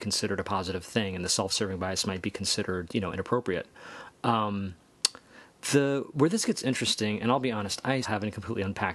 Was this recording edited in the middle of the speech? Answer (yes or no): yes